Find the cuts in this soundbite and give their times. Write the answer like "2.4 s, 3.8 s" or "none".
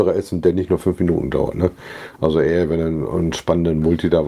none